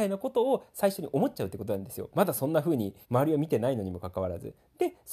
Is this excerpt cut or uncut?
cut